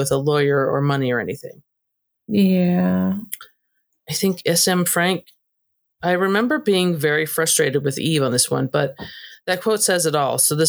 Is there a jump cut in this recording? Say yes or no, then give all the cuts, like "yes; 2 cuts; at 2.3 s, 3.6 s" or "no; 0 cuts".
no; 0 cuts